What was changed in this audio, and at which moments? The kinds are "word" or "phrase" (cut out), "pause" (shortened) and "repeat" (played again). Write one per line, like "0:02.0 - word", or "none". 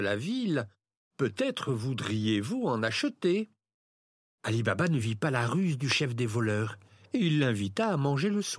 none